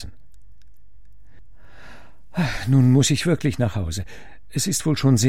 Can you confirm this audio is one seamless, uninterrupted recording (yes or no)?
yes